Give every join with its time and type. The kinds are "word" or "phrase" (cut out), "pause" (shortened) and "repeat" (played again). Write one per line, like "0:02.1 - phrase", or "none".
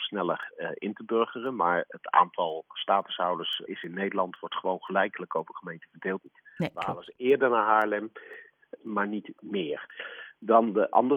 0:03.7 - word
0:06.2 - phrase
0:08.8 - word